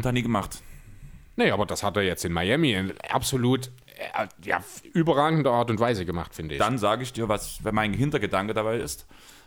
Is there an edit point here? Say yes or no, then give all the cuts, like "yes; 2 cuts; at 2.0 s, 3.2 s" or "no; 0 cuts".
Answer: no; 0 cuts